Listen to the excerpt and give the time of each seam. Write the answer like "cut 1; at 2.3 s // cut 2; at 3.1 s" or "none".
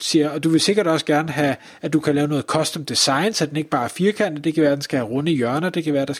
none